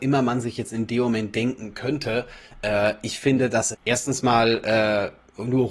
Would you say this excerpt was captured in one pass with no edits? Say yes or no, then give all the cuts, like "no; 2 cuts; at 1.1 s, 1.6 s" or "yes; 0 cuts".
no; 1 cut; at 3.7 s